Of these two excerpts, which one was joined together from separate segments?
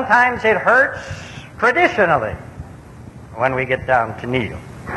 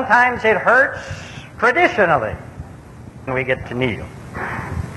second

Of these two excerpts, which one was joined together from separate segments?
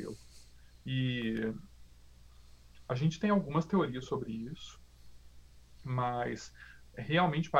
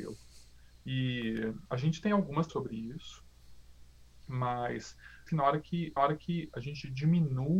second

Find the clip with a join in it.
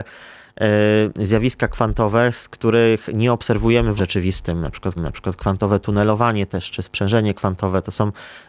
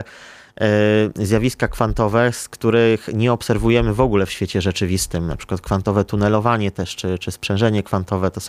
first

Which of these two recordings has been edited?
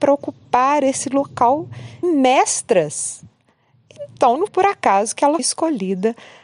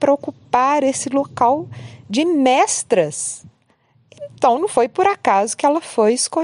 first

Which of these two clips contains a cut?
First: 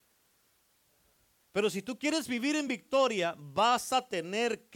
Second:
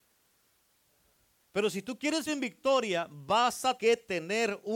second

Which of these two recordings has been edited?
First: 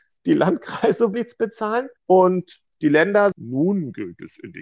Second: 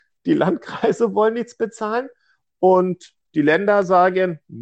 first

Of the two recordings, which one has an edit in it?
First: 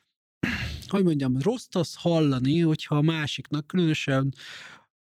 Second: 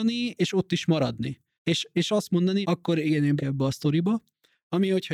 second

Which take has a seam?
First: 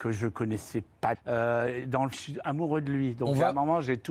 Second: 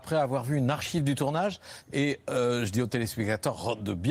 first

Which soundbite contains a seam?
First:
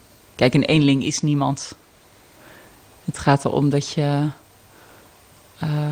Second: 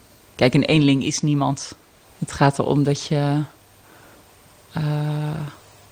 second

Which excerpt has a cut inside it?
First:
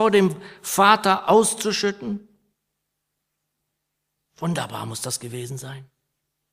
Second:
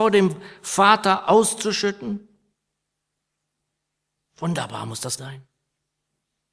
second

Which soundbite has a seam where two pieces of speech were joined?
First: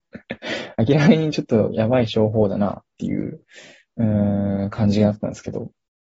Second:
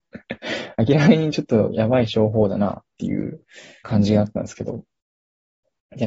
second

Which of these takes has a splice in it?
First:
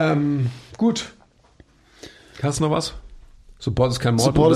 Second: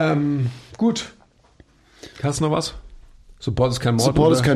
second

